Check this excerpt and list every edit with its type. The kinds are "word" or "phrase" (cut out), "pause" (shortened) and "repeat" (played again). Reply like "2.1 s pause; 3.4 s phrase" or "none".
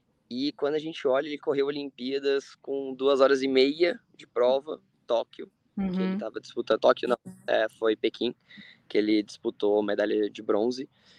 4.9 s pause